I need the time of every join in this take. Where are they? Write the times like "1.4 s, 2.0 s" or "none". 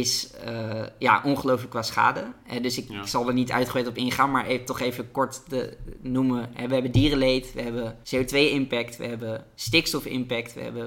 8.0 s